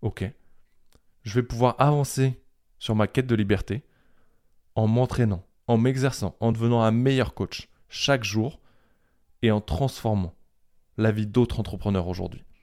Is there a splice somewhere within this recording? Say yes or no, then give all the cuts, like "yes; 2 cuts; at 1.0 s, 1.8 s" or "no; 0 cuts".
no; 0 cuts